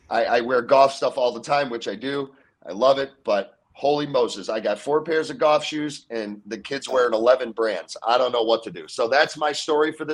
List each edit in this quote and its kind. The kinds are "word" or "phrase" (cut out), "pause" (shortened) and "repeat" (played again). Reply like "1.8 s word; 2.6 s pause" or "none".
none